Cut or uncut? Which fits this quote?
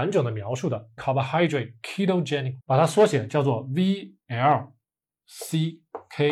cut